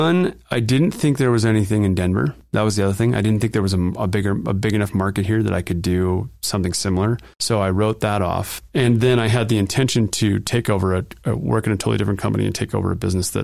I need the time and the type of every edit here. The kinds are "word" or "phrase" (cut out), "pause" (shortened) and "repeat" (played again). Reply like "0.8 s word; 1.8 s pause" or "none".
7.3 s pause